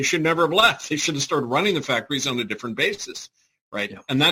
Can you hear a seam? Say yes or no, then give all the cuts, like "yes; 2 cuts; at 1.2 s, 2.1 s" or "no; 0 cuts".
no; 0 cuts